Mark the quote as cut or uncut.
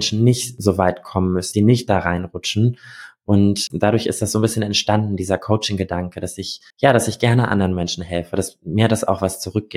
cut